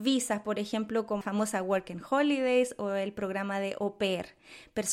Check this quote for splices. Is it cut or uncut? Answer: cut